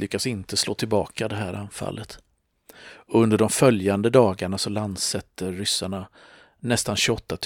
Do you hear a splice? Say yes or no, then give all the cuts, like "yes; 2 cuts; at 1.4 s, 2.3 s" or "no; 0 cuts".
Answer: no; 0 cuts